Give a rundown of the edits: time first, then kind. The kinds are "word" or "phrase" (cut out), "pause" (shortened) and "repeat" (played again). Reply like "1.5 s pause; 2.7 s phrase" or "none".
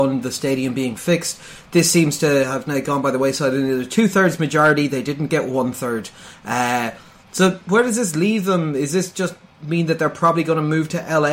none